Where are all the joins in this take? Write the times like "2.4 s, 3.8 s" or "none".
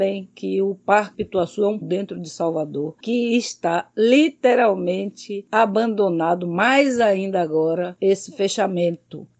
1.1 s, 1.8 s, 8.0 s